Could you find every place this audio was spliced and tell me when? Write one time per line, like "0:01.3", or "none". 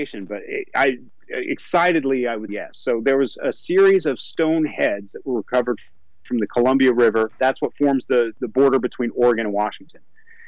0:02.5
0:08.3